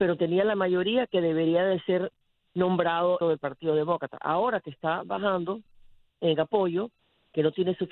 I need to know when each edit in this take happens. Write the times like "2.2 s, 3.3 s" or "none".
3.2 s